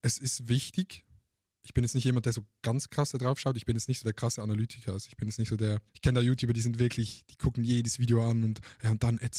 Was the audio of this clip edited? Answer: yes; 1 cut; at 5.9 s

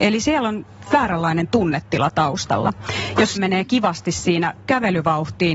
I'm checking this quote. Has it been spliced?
yes; 1 cut; at 3.4 s

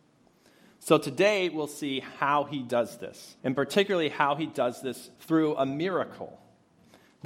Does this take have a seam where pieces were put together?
yes; 2 cuts; at 3.4 s, 5.2 s

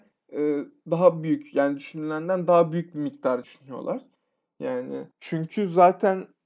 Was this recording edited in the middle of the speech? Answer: yes; 2 cuts; at 3.4 s, 5.1 s

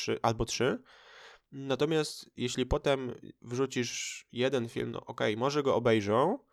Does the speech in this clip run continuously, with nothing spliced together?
yes; 0 cuts

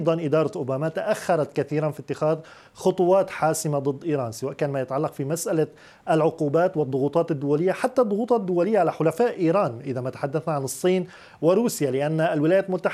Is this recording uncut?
yes; 0 cuts

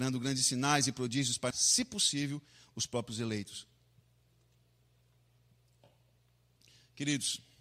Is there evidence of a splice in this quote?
yes; 1 cut; at 1.5 s

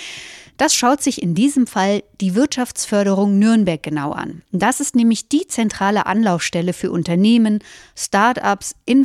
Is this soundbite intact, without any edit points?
yes; 0 cuts

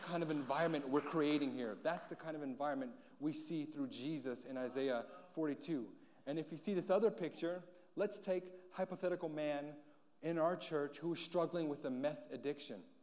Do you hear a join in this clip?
no; 0 cuts

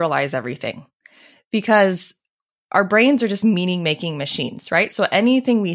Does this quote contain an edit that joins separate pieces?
no; 0 cuts

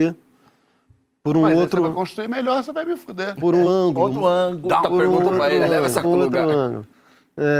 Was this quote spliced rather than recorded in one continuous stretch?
yes; 3 cuts; at 3.6 s, 4.8 s, 6.0 s

